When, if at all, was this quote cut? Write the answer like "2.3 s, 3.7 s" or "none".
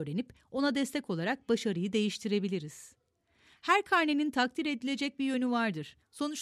none

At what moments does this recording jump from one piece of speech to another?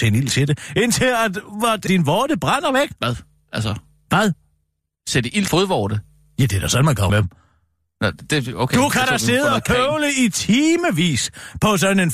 1.9 s, 5.5 s, 7.1 s

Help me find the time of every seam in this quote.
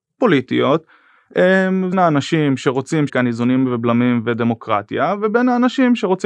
1.9 s, 3.1 s

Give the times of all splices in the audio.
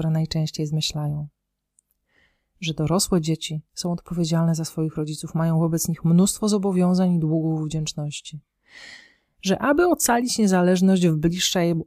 none

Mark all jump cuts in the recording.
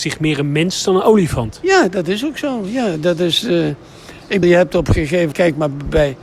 4.4 s, 5.3 s

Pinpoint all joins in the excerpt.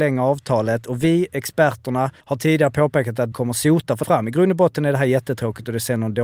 2.2 s, 3.3 s, 4.0 s

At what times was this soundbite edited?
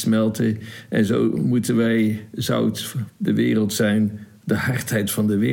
3.1 s

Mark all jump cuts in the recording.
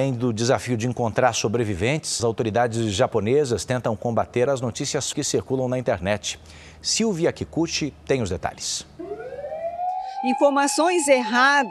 2.2 s, 4.5 s, 5.1 s

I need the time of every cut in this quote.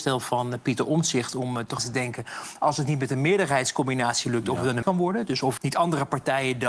1.8 s, 4.8 s, 5.6 s

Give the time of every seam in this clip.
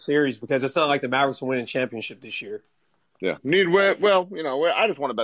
none

